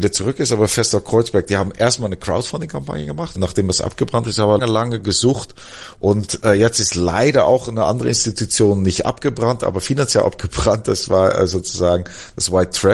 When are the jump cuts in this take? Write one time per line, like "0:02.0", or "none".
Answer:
0:03.3
0:04.6

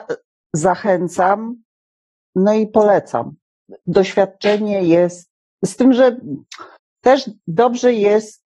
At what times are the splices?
0:01.9
0:03.8
0:05.4

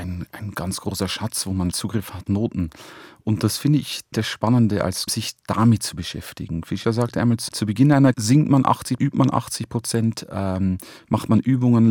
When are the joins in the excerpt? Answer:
0:01.7
0:02.3
0:04.1
0:05.1
0:06.8
0:07.5
0:08.1
0:09.0

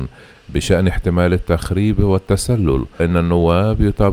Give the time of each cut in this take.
0:03.0

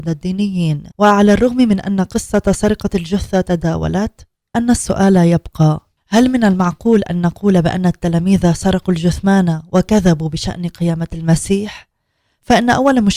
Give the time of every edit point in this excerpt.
0:00.9
0:04.5

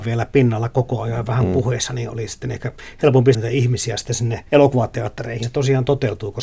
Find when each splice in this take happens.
0:03.3
0:04.5
0:05.4

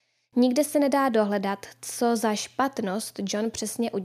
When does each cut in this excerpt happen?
none

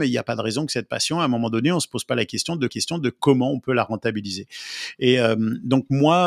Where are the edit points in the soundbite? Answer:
0:02.7

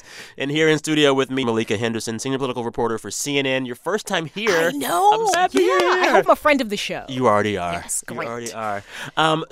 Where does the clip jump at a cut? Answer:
0:01.4
0:05.3
0:06.3

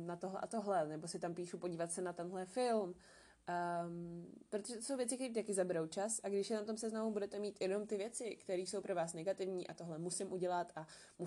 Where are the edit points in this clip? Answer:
none

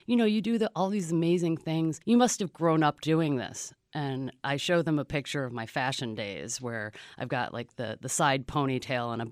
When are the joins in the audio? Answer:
0:02.0

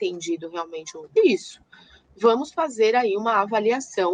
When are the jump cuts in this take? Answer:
0:01.2

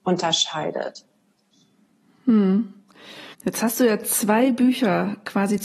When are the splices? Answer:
0:03.3

